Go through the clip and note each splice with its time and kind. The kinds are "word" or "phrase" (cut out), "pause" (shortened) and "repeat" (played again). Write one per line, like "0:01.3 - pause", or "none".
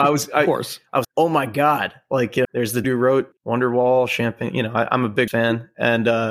0:01.0 - word
0:02.4 - word
0:02.8 - word
0:03.4 - pause
0:05.3 - word

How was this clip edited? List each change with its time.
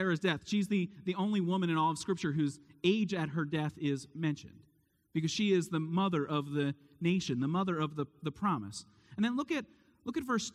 none

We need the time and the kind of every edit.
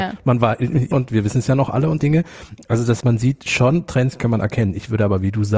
0:00.9 - word
0:02.0 - word
0:03.0 - word

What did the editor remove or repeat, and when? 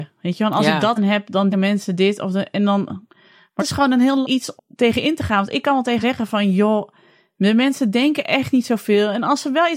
0:01.0 - word
0:01.5 - word
0:03.6 - word
0:04.2 - word
0:04.6 - word
0:06.0 - word

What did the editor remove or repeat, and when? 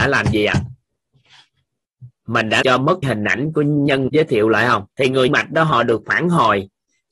0:02.6 - word
0:03.0 - word
0:04.1 - word
0:04.9 - pause
0:05.3 - word

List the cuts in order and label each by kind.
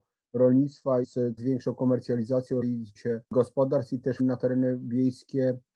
0:01.0 - word
0:01.4 - word
0:02.6 - word
0:03.0 - word
0:04.2 - word

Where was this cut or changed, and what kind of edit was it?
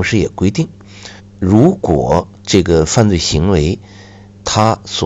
0:01.2 - pause
0:02.4 - pause

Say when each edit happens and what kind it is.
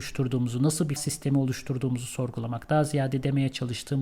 0:01.0 - word

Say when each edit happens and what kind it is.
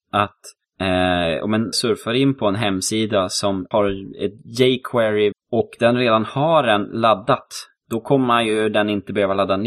0:01.7 - word
0:03.7 - word
0:05.3 - word

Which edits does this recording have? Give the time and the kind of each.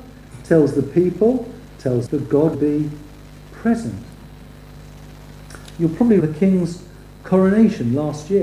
0:02.1 - word
0:02.5 - word
0:06.2 - word

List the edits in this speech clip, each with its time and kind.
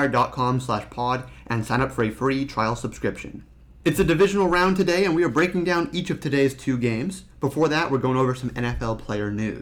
none

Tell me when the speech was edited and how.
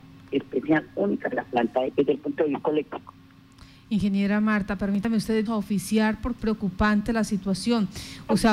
0:01.3 - word
0:01.9 - word
0:05.5 - phrase
0:06.4 - word

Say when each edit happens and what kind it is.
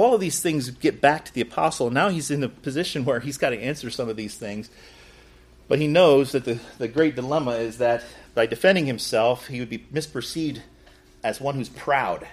none

